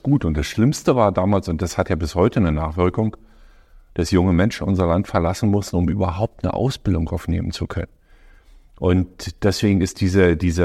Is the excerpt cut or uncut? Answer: uncut